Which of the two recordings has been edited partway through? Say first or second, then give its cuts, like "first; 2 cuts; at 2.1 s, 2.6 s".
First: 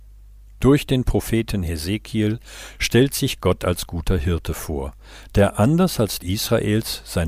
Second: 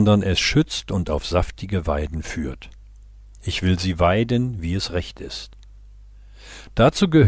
first; 1 cut; at 6.2 s